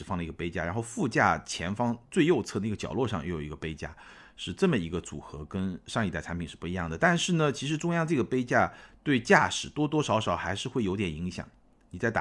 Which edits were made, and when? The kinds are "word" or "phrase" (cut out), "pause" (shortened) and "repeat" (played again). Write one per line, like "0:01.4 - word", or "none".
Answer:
none